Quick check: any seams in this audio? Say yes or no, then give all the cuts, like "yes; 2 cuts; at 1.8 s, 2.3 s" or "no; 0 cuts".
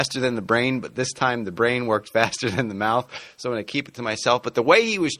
no; 0 cuts